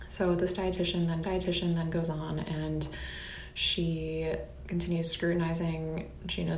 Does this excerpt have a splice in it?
yes; 1 cut; at 1.2 s

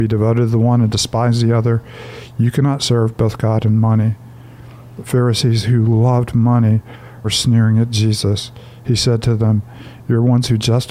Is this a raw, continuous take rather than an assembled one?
no; 1 cut; at 7.2 s

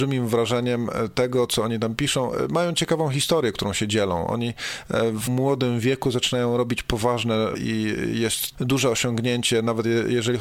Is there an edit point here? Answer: yes; 3 cuts; at 5.3 s, 7.5 s, 8.5 s

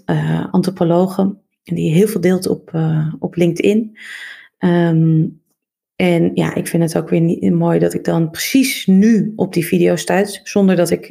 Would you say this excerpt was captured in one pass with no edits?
yes; 0 cuts

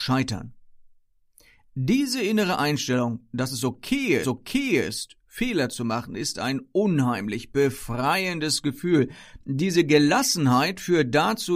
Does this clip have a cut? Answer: yes; 1 cut; at 4.2 s

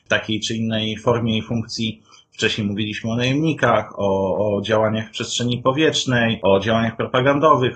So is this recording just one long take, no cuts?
yes; 0 cuts

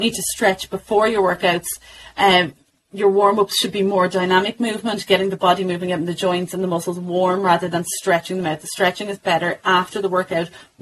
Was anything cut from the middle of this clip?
no; 0 cuts

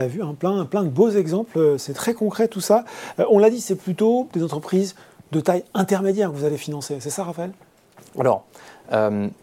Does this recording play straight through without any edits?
yes; 0 cuts

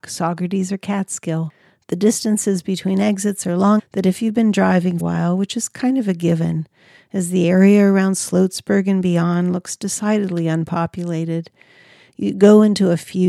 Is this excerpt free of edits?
no; 2 cuts; at 3.8 s, 5.0 s

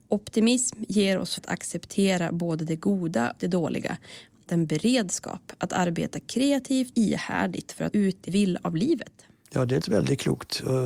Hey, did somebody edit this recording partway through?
yes; 7 cuts; at 1.4 s, 3.4 s, 4.5 s, 6.9 s, 7.9 s, 8.3 s, 9.8 s

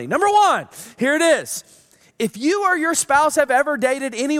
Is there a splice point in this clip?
no; 0 cuts

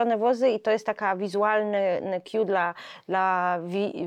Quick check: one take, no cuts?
yes; 0 cuts

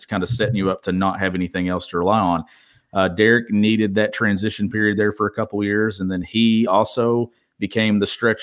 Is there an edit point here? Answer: no; 0 cuts

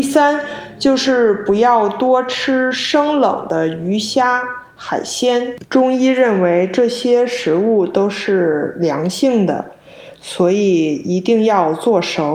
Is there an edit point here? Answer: yes; 1 cut; at 5.7 s

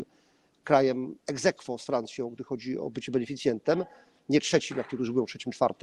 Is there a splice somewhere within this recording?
no; 0 cuts

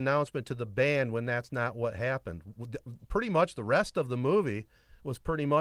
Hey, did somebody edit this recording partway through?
no; 0 cuts

